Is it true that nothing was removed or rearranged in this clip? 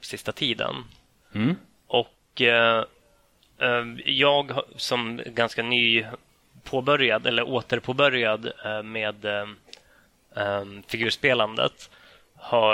yes; 0 cuts

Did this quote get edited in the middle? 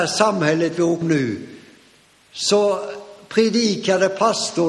yes; 1 cut; at 1.0 s

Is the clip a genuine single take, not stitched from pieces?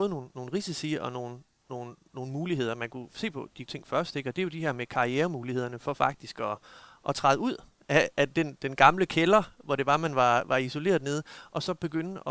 no; 1 cut; at 3.7 s

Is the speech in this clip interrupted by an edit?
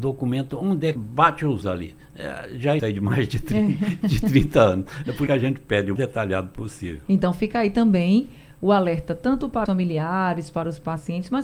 yes; 6 cuts; at 1.0 s, 1.6 s, 2.8 s, 5.3 s, 6.0 s, 9.7 s

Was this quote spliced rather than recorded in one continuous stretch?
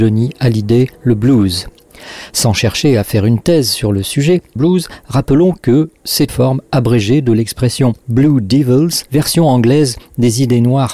yes; 5 cuts; at 0.9 s, 4.6 s, 6.3 s, 8.0 s, 9.1 s

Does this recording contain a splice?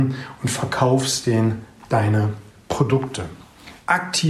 no; 0 cuts

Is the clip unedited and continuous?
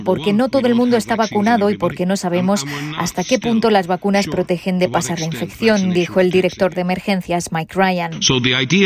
yes; 0 cuts

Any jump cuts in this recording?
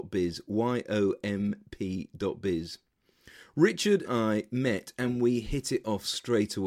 yes; 1 cut; at 4.0 s

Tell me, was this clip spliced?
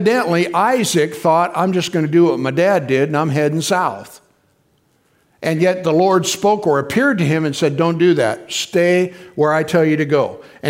no; 0 cuts

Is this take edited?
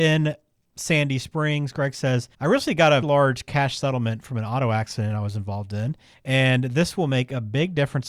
yes; 3 cuts; at 2.3 s, 3.0 s, 6.1 s

